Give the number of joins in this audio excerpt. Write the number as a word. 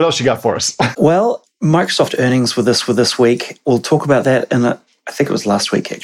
one